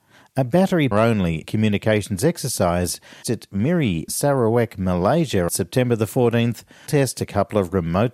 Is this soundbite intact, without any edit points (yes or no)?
no